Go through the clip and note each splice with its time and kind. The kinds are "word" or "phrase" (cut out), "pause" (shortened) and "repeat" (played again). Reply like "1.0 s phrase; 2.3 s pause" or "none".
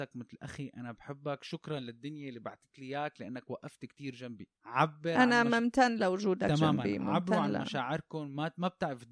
4.6 s pause